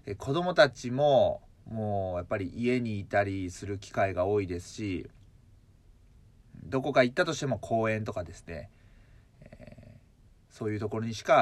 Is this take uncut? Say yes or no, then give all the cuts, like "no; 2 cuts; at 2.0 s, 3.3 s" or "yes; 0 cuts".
yes; 0 cuts